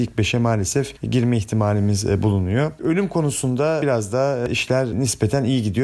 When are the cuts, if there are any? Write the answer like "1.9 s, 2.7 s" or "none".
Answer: none